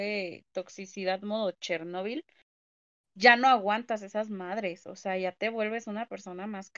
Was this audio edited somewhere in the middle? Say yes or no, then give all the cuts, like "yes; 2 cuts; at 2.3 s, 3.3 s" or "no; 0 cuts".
no; 0 cuts